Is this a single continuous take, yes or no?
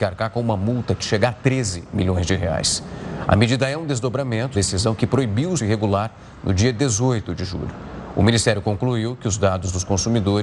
no